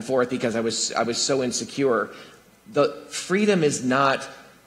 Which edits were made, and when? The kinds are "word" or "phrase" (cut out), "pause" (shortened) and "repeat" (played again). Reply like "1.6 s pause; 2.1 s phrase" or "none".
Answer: none